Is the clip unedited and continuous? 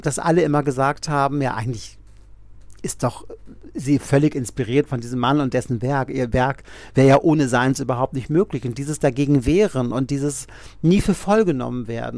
yes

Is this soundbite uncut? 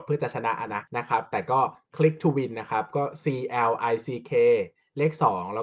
yes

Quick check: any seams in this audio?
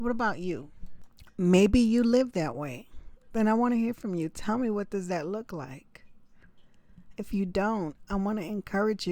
no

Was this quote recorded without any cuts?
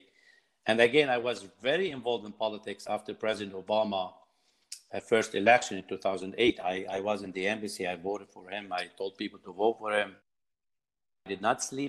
yes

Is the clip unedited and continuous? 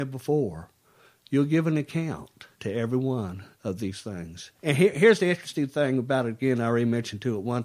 no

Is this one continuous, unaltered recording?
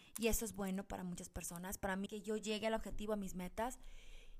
no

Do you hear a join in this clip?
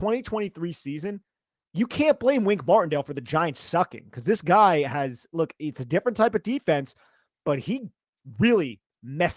no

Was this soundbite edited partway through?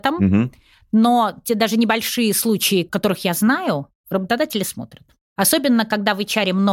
no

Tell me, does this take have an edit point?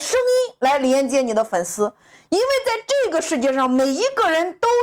no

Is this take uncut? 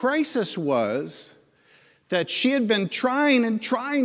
yes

